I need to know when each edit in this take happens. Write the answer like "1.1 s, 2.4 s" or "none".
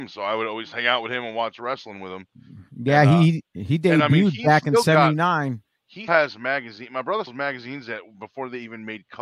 6.1 s, 7.3 s